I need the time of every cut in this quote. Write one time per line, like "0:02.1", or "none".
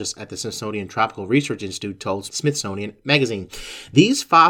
0:02.3